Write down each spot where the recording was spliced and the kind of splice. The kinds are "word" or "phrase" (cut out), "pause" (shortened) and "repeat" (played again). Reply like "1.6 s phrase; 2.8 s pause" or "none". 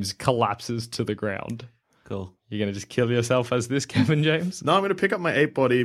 none